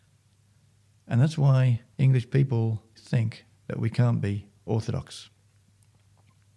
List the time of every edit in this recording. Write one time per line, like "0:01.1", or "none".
0:01.9
0:02.9
0:03.5